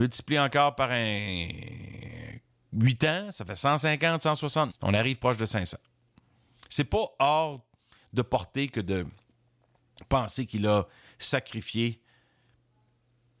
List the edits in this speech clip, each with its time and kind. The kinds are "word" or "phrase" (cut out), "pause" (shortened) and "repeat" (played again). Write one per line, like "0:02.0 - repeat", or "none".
0:04.7 - word

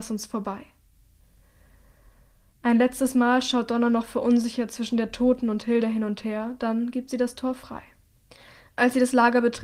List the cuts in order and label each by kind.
0:08.3 - pause

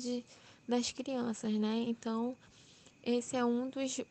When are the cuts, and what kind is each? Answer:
none

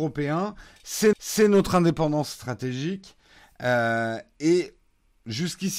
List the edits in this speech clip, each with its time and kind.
0:01.1 - repeat

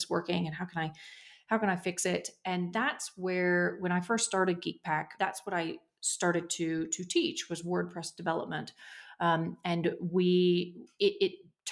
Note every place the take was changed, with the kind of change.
0:05.2 - word

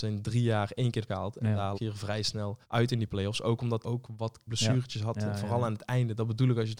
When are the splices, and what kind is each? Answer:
0:01.1 - word
0:01.7 - word
0:02.6 - pause
0:03.8 - phrase
0:04.5 - word

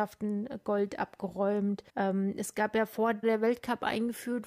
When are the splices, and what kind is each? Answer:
0:01.9 - pause
0:03.2 - word

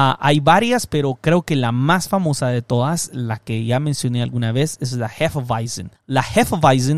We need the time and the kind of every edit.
0:05.9 - pause

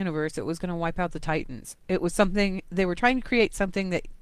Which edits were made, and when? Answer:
none

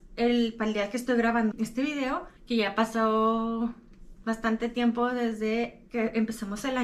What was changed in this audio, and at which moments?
0:01.5 - word
0:02.4 - pause

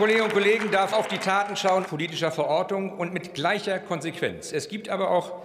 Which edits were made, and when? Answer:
0:00.9 - word
0:01.9 - word

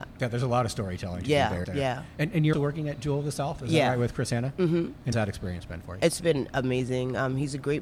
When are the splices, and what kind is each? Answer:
0:01.6 - word
0:02.5 - word
0:05.1 - word

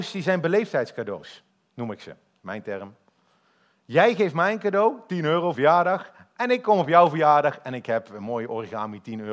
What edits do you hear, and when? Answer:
0:01.5 - pause
0:05.5 - phrase

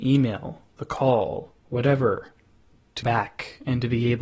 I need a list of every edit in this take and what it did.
0:01.6 - pause
0:03.0 - word

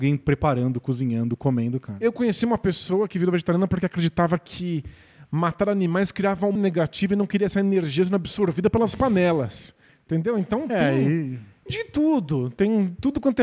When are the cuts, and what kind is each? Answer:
0:06.6 - word
0:11.7 - word

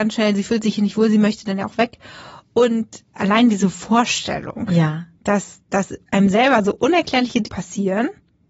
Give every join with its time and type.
0:03.2 - word
0:05.1 - pause
0:06.0 - pause
0:07.4 - word

